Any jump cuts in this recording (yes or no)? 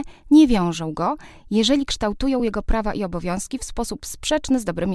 no